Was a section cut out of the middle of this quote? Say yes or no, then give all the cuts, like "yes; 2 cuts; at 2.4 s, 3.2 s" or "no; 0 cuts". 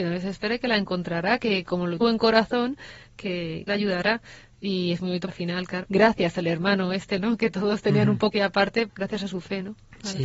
yes; 7 cuts; at 2.0 s, 3.7 s, 5.3 s, 5.8 s, 7.2 s, 8.3 s, 8.9 s